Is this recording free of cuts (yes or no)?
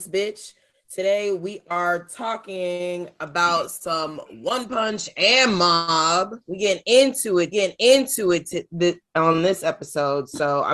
no